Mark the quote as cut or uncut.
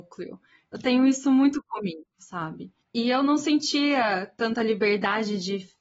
cut